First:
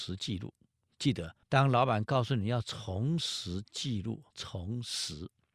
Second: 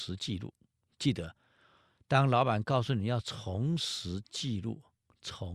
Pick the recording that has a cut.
first; 2 cuts; at 1.4 s, 4.3 s

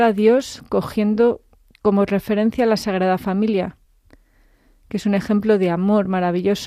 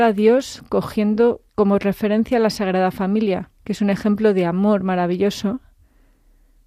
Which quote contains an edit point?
second; 2 cuts; at 1.5 s, 3.5 s

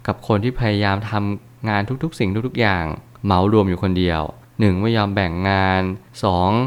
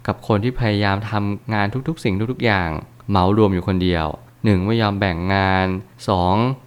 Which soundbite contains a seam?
second; 1 cut; at 1.4 s

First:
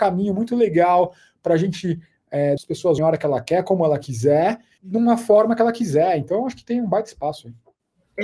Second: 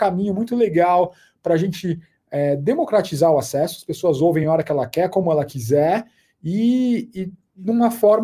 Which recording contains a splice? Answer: first; 3 cuts; at 2.6 s, 3.0 s, 4.8 s

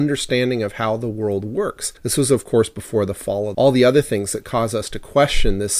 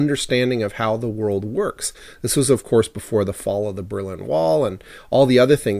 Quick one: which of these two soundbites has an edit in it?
first; 2 cuts; at 2.0 s, 3.5 s

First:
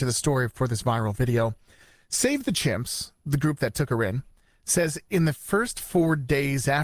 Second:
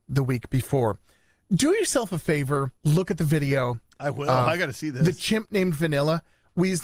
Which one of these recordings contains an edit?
second; 1 cut; at 2.8 s

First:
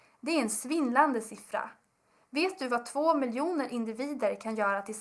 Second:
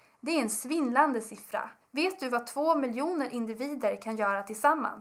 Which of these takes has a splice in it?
second; 1 cut; at 1.8 s

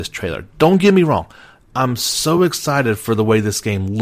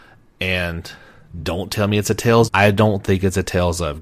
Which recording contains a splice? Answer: second; 1 cut; at 2.5 s

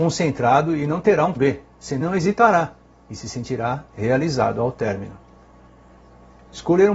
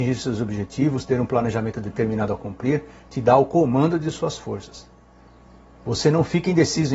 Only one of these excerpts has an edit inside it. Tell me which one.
first; 2 cuts; at 1.4 s, 2.0 s

